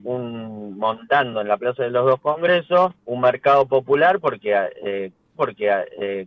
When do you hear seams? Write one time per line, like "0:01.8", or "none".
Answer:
0:03.0
0:05.3